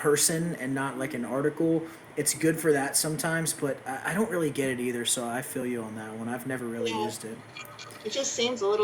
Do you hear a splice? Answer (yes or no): no